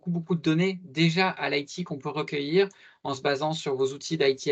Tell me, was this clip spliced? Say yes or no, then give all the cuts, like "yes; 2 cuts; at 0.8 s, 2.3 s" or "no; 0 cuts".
no; 0 cuts